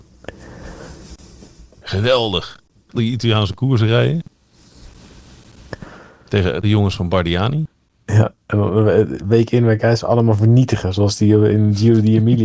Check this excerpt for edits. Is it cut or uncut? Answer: cut